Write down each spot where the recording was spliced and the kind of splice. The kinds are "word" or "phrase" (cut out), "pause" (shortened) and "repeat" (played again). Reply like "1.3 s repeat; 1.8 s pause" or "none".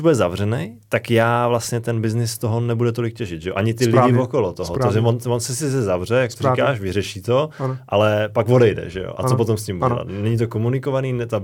9.8 s word